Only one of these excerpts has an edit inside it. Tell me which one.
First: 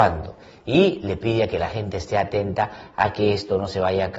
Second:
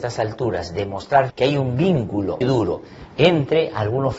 second; 2 cuts; at 1.3 s, 2.4 s

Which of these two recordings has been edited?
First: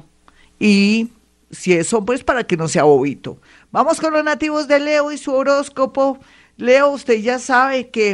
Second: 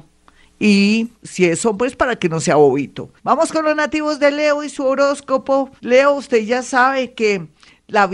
second; 3 cuts; at 1.1 s, 3.2 s, 5.8 s

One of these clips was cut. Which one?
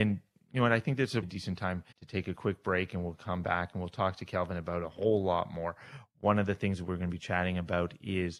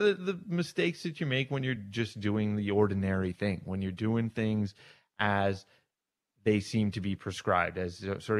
first; 2 cuts; at 1.2 s, 1.9 s

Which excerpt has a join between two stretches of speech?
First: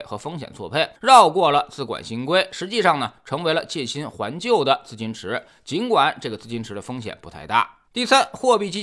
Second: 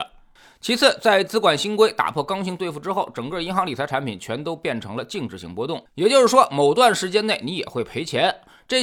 first; 2 cuts; at 1.0 s, 7.9 s

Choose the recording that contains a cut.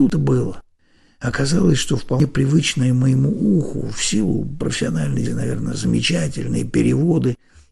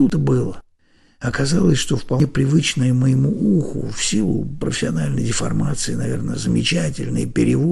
first; 1 cut; at 5.3 s

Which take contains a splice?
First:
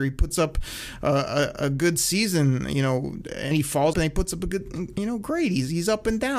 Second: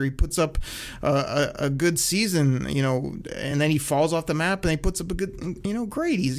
first; 2 cuts; at 3.5 s, 3.9 s

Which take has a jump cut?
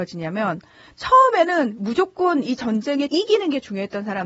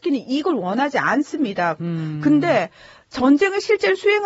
first; 1 cut; at 3.1 s

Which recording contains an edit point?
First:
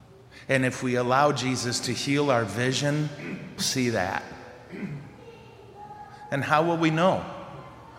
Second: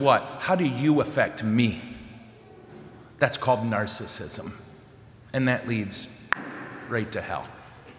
first; 1 cut; at 3.6 s

